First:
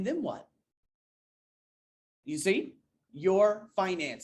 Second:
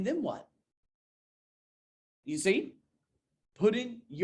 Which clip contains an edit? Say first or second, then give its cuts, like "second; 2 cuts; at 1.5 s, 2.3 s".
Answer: first; 1 cut; at 3.1 s